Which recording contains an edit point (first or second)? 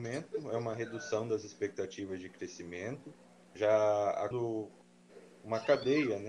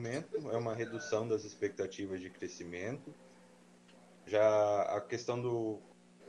first